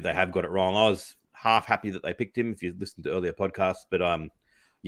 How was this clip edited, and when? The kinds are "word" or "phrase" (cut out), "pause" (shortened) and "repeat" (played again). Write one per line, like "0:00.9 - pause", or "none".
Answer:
0:01.2 - pause